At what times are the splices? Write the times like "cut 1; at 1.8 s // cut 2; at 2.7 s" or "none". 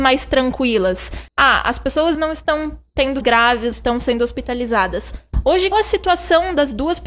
cut 1; at 1.3 s // cut 2; at 2.1 s // cut 3; at 3.2 s // cut 4; at 3.7 s // cut 5; at 5.7 s